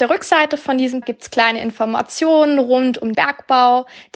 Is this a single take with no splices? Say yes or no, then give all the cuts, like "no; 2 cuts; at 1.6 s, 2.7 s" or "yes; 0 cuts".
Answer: no; 2 cuts; at 1.0 s, 3.1 s